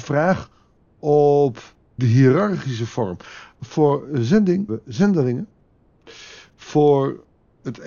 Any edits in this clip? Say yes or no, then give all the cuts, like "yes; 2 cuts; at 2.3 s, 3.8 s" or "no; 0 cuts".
yes; 2 cuts; at 2.0 s, 4.7 s